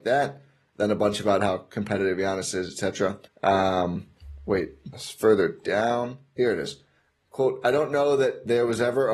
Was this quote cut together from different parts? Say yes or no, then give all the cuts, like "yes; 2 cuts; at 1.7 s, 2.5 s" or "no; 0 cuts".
yes; 2 cuts; at 3.3 s, 4.9 s